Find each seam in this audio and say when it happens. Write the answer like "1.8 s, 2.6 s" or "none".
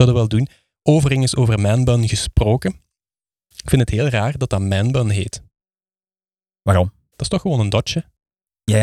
none